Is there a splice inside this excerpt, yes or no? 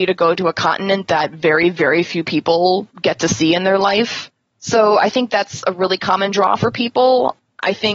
no